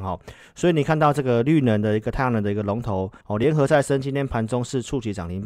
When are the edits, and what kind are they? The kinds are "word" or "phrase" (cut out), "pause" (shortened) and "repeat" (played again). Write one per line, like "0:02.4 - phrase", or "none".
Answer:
0:03.2 - pause